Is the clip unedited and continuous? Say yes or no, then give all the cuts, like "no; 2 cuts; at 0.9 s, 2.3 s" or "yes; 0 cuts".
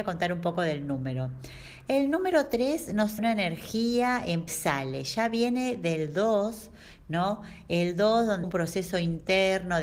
no; 3 cuts; at 3.2 s, 4.5 s, 8.4 s